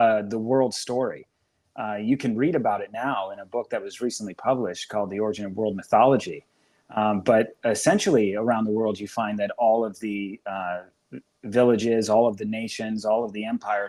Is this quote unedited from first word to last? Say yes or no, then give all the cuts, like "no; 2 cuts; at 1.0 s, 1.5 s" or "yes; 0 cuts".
yes; 0 cuts